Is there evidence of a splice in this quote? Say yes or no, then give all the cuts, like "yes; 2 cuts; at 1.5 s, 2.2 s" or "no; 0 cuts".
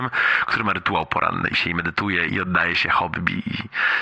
yes; 2 cuts; at 1.5 s, 2.3 s